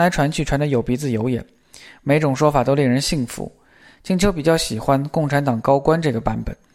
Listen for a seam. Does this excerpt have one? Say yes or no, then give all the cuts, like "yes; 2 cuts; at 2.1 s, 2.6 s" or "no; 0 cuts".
no; 0 cuts